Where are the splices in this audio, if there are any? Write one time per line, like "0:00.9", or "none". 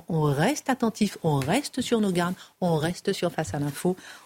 none